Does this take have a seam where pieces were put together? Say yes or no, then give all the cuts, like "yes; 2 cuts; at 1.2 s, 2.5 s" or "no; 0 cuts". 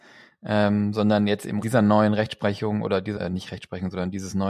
yes; 2 cuts; at 1.6 s, 3.2 s